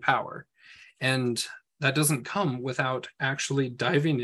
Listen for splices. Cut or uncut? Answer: uncut